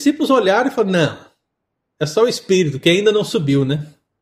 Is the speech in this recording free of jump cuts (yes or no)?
yes